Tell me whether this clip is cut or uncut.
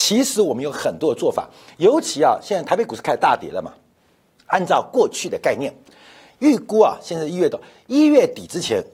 uncut